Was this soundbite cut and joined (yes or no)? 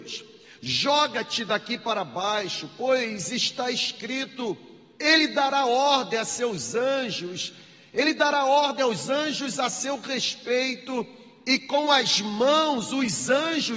no